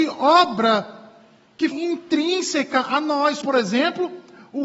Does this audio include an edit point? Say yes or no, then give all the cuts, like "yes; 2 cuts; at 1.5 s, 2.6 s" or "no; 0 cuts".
yes; 2 cuts; at 1.7 s, 3.4 s